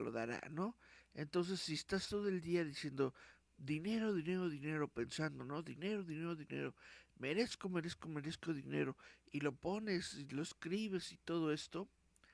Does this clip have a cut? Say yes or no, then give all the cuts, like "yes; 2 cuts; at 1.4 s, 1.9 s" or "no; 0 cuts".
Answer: no; 0 cuts